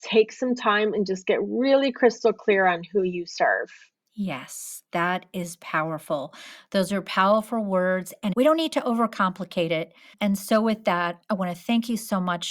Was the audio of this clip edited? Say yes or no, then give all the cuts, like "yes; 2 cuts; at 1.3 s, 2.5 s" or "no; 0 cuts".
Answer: no; 0 cuts